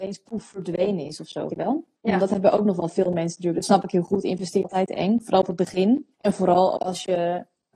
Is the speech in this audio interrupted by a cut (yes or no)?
yes